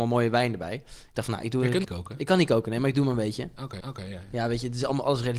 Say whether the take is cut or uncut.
cut